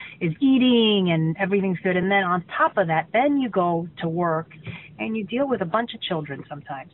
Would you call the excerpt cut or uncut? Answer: uncut